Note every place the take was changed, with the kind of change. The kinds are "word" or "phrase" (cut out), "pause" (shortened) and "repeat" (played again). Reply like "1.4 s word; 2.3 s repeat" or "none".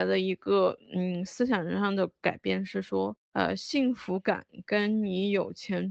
3.2 s pause